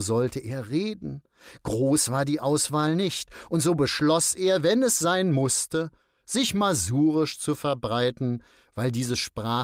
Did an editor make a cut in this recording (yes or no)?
no